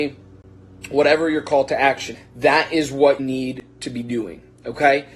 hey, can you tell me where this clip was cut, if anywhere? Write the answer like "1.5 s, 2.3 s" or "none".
2.1 s, 3.2 s